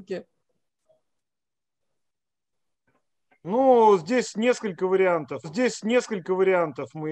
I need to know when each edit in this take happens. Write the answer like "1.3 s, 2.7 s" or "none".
5.4 s